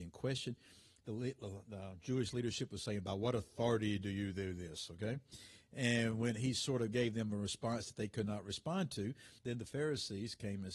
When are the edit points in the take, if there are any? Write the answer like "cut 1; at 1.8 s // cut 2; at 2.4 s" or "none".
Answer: cut 1; at 9.4 s